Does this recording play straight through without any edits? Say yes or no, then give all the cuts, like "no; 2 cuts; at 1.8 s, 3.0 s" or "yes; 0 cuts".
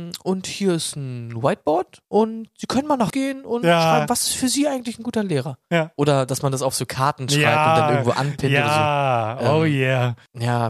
no; 3 cuts; at 2.0 s, 3.1 s, 6.7 s